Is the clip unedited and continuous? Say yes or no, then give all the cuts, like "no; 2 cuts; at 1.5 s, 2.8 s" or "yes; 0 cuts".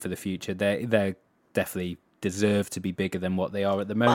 yes; 0 cuts